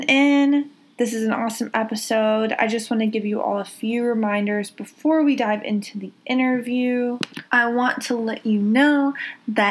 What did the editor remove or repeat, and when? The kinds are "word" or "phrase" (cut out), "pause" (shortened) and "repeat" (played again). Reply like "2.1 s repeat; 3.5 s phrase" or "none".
7.5 s pause